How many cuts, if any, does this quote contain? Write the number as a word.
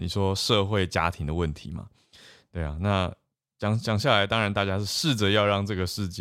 zero